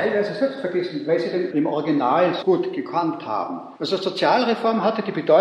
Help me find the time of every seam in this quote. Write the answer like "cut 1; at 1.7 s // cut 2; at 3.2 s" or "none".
cut 1; at 1.5 s // cut 2; at 2.4 s // cut 3; at 3.8 s